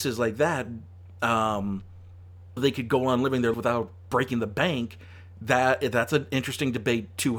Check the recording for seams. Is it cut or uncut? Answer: cut